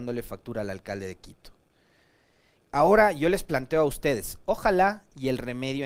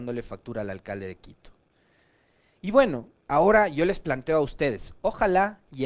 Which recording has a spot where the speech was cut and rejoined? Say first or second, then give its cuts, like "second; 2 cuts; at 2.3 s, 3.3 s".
first; 1 cut; at 2.6 s